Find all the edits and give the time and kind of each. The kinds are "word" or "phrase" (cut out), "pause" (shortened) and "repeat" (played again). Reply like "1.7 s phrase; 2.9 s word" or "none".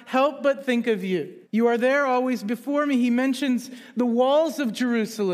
1.4 s pause